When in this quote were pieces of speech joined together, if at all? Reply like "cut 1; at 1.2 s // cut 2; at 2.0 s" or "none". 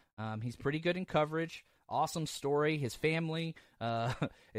none